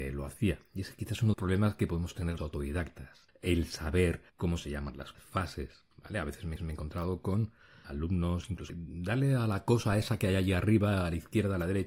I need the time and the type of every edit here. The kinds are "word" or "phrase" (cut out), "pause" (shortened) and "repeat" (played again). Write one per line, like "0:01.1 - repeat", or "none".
0:01.3 - phrase
0:02.4 - word
0:04.3 - pause
0:05.1 - phrase
0:05.9 - pause
0:06.6 - repeat
0:07.8 - word
0:08.7 - phrase